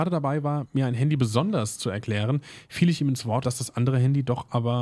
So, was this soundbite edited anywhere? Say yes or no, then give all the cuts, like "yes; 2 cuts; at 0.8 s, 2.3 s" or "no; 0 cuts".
yes; 1 cut; at 3.4 s